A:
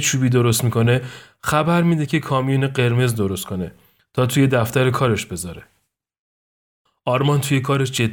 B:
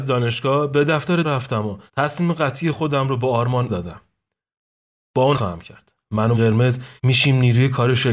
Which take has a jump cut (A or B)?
B